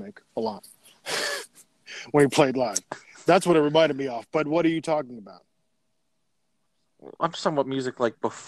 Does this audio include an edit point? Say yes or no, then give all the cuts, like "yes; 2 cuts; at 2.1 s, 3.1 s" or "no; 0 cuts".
no; 0 cuts